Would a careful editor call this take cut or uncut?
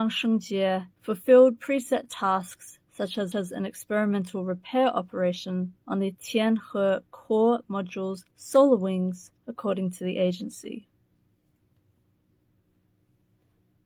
cut